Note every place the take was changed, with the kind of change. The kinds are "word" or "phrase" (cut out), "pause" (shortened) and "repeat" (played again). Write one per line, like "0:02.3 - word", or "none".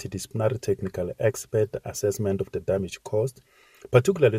none